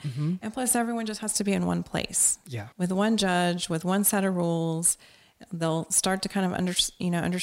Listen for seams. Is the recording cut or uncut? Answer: cut